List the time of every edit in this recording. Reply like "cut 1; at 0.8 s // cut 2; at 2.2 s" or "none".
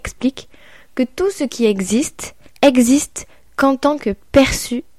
cut 1; at 2.5 s